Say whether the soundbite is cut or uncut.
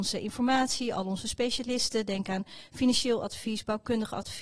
uncut